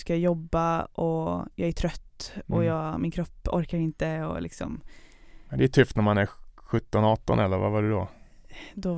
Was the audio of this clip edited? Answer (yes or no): no